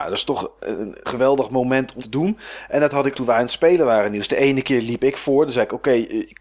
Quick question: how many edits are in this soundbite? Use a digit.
3